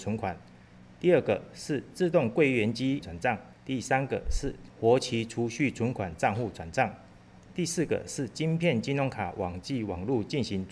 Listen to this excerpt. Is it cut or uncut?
cut